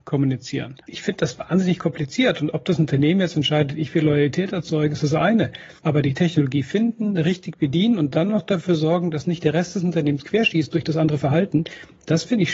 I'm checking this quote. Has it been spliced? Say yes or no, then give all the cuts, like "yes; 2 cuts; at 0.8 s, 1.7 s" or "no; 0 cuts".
yes; 1 cut; at 5.8 s